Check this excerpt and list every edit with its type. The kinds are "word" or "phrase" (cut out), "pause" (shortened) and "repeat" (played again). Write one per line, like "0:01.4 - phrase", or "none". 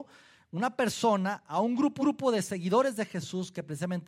0:02.0 - repeat

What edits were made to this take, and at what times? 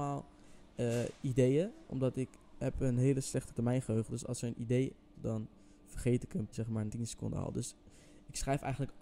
0:03.5 - word
0:05.1 - word
0:06.5 - word
0:06.9 - word

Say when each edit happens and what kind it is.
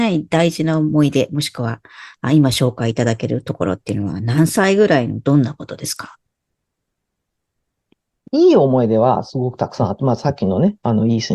none

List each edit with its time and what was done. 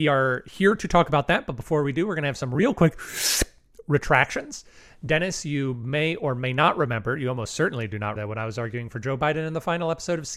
0:08.2 - word

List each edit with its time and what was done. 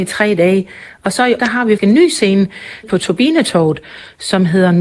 0:01.4 - word
0:01.8 - word
0:02.8 - word

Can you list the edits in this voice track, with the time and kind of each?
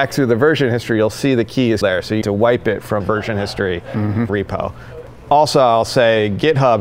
0:01.8 - word
0:02.2 - word
0:03.0 - phrase
0:04.3 - word

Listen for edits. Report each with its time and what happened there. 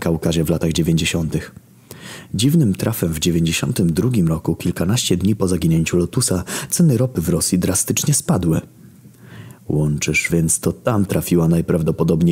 0:10.3 - phrase

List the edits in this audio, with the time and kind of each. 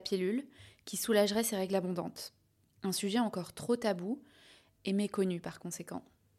none

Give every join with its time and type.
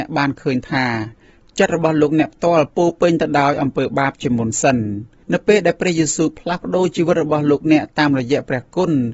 0:05.2 - pause

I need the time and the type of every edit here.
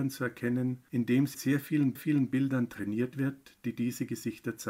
0:01.3 - word
0:02.0 - repeat

